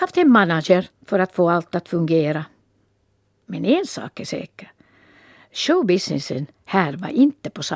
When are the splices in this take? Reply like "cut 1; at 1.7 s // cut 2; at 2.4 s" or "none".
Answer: none